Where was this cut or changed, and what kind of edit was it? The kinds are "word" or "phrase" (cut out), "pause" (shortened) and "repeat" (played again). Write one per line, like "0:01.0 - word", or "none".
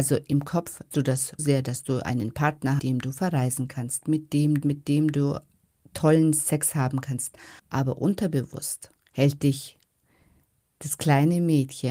0:00.9 - word
0:01.4 - word
0:02.8 - phrase
0:04.6 - phrase
0:05.8 - pause
0:07.6 - pause
0:09.0 - pause